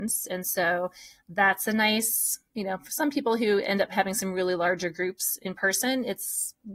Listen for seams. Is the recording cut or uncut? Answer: uncut